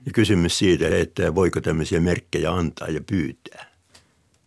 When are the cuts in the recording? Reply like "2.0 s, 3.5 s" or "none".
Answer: 0.9 s